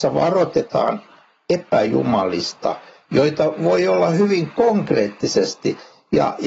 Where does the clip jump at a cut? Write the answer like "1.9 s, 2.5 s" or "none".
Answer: none